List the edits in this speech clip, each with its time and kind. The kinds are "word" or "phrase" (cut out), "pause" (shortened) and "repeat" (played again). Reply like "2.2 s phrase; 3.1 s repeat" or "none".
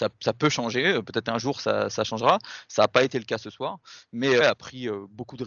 1.9 s word; 4.4 s word